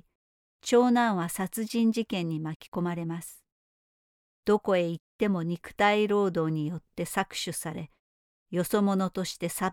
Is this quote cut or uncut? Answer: uncut